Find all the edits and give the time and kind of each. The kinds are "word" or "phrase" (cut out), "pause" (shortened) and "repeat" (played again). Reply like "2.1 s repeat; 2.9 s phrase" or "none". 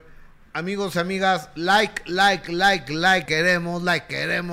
3.3 s word